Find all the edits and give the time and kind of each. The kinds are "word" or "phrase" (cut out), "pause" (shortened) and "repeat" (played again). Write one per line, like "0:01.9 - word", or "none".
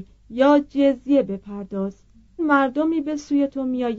0:02.4 - word